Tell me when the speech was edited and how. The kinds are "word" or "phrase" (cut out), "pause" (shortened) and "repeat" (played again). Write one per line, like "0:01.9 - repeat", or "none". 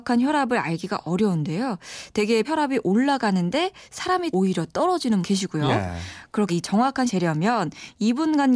0:02.4 - word
0:04.3 - word
0:05.2 - word
0:06.5 - word
0:07.1 - word